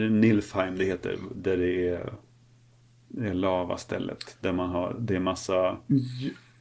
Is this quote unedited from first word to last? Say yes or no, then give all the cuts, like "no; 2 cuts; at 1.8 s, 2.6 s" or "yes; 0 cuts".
yes; 0 cuts